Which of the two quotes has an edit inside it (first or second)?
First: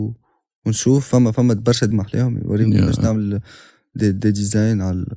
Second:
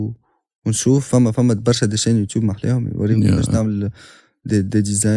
first